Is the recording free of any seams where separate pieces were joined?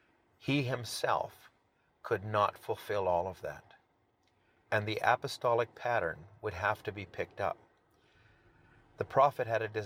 yes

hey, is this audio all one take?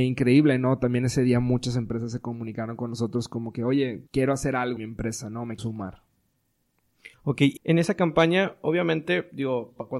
no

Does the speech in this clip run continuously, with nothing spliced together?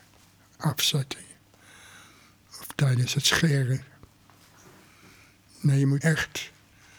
no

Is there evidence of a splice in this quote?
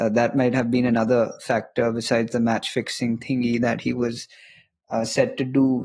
no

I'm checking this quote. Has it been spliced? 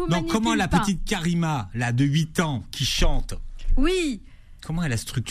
no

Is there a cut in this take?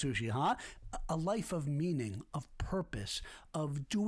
no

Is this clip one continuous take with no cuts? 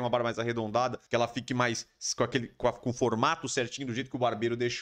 no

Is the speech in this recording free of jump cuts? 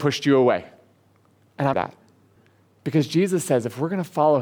no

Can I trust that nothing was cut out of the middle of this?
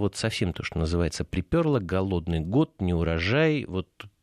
yes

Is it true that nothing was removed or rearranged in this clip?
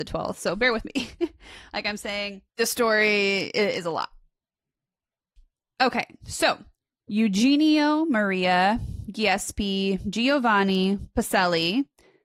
no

